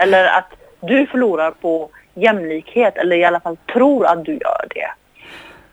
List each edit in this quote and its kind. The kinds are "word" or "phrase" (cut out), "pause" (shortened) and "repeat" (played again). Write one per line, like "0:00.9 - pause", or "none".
none